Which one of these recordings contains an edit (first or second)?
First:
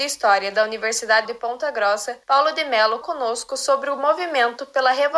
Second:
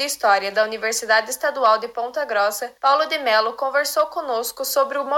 first